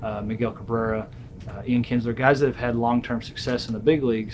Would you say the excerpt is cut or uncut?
uncut